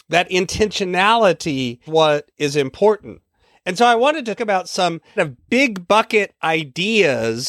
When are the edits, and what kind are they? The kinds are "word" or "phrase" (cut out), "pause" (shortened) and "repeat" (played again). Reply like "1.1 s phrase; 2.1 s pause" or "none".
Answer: 1.9 s word; 3.4 s pause; 4.4 s word; 5.2 s word